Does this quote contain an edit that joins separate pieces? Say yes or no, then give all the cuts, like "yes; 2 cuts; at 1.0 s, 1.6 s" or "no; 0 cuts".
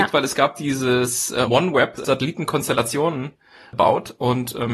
yes; 2 cuts; at 1.5 s, 2.0 s